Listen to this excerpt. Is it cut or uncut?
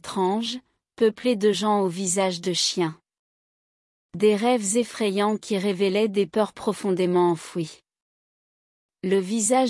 uncut